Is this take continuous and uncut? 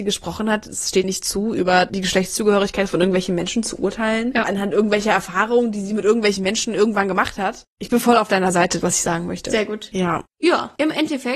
no; 3 cuts; at 1.0 s, 8.8 s, 10.3 s

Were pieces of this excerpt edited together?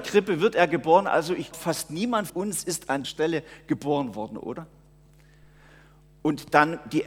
yes; 3 cuts; at 1.5 s, 2.3 s, 3.0 s

